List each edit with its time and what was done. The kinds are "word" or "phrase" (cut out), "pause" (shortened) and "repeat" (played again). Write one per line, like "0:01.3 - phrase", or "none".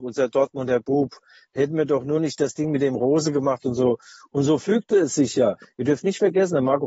none